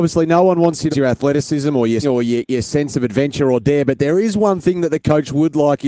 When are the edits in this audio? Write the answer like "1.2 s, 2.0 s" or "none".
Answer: 0.9 s, 2.0 s